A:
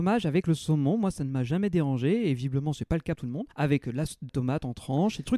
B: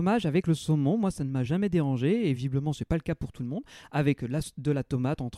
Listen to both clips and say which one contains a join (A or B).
A